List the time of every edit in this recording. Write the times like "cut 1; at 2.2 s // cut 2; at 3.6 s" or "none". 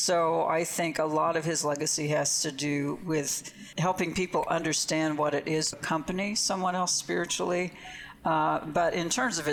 cut 1; at 3.7 s // cut 2; at 5.7 s